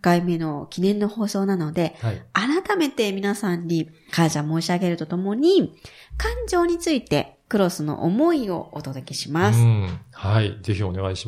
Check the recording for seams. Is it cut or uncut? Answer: uncut